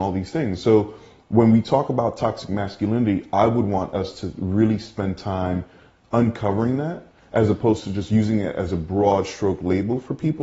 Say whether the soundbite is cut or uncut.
uncut